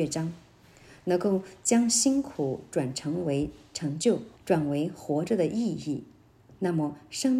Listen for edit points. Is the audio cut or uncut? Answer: cut